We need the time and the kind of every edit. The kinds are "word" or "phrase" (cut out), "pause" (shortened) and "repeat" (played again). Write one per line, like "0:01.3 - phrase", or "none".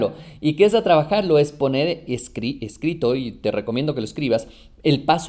none